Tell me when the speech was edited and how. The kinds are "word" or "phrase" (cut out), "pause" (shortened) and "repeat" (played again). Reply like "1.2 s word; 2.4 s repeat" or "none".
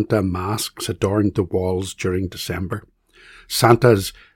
none